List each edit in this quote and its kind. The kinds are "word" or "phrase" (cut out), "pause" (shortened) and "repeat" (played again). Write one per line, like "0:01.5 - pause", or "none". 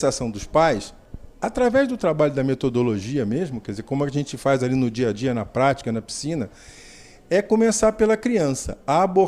none

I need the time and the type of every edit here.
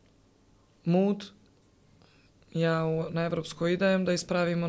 none

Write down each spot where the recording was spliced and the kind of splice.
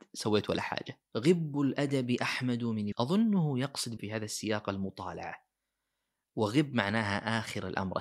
0:02.9 - word
0:04.0 - word

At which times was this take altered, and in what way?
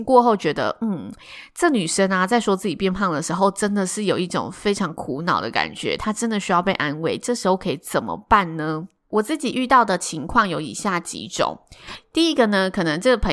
0:09.0 - pause

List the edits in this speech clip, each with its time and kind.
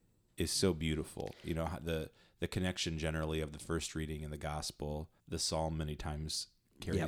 0:05.2 - pause

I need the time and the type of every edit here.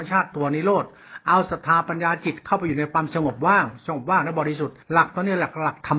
0:04.8 - pause

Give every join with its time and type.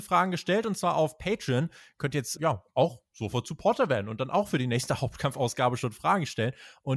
0:02.4 - word

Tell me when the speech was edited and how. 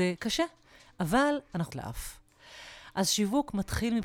0:01.7 - phrase

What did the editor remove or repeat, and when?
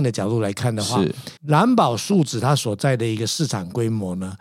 0:01.4 - pause

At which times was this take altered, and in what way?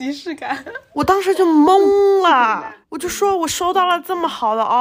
0:02.8 - pause

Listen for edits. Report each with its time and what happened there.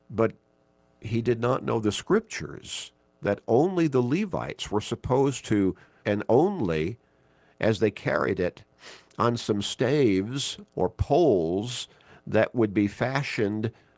0:06.0 - phrase

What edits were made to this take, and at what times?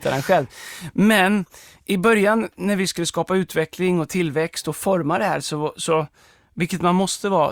none

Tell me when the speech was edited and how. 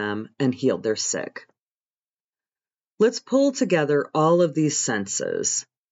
none

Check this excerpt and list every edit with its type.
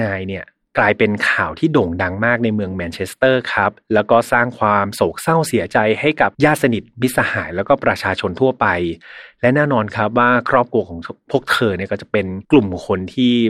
0:06.3 - pause
0:12.4 - pause

